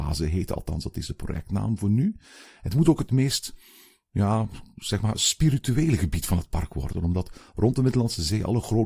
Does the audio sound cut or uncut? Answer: uncut